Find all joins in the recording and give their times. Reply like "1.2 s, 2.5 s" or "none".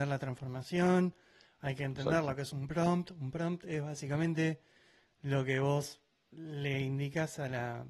none

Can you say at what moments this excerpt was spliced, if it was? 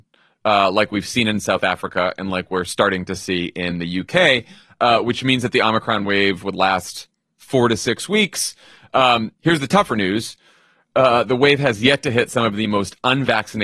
none

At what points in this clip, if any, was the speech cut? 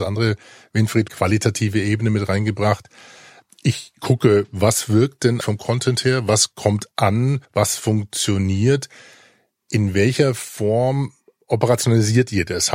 1.1 s, 5.4 s, 7.4 s

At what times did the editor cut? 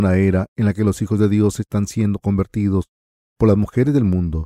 none

